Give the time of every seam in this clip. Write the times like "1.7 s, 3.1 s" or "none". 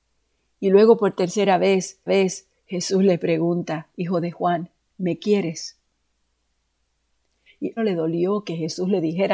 2.1 s, 3.9 s, 4.8 s, 7.8 s